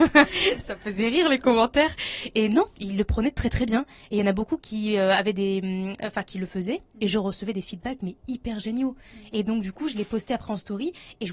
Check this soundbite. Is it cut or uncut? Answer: uncut